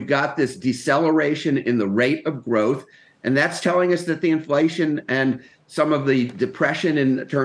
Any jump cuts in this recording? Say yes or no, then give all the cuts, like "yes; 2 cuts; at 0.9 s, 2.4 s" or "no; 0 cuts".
no; 0 cuts